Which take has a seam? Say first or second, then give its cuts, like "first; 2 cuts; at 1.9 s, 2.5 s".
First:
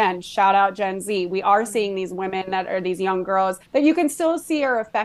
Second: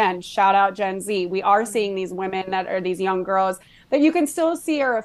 first; 1 cut; at 3.7 s